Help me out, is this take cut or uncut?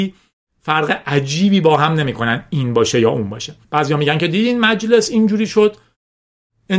cut